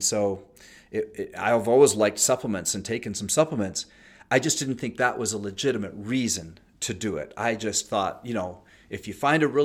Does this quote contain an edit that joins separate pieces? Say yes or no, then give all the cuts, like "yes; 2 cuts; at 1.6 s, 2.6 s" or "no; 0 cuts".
no; 0 cuts